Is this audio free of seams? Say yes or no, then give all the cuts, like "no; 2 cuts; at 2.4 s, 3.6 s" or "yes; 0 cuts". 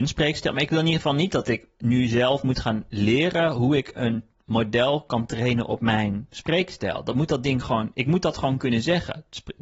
yes; 0 cuts